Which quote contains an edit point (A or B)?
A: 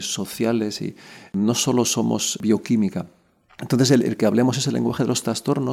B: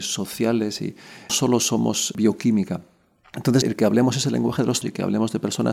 B